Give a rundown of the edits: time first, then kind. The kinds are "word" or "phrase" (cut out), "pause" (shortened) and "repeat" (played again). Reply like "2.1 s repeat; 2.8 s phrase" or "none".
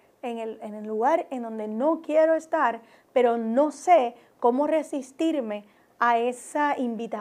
none